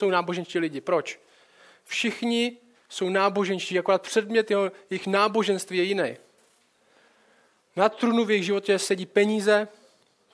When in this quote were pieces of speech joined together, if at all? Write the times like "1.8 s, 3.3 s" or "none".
none